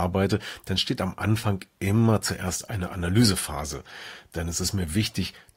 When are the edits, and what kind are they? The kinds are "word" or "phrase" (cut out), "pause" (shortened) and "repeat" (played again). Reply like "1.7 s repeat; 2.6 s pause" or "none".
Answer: none